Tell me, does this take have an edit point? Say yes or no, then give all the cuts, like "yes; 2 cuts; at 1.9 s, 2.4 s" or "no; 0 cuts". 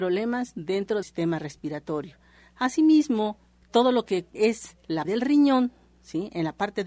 yes; 3 cuts; at 1.0 s, 4.4 s, 5.0 s